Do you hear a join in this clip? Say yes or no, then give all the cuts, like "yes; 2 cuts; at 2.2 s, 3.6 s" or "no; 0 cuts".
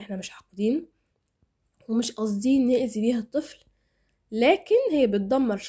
no; 0 cuts